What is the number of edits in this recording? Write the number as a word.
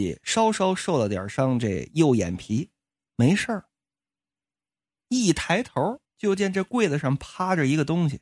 one